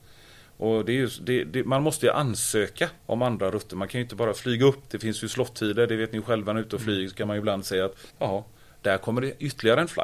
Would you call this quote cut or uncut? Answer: cut